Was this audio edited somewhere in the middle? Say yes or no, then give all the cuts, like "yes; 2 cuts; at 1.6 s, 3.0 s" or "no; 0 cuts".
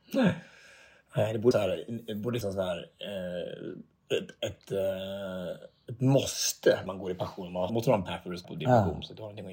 yes; 6 cuts; at 1.5 s, 2.4 s, 6.9 s, 7.7 s, 8.1 s, 8.4 s